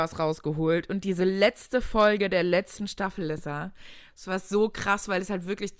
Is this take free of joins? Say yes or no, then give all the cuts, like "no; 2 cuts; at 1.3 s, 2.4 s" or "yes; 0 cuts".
yes; 0 cuts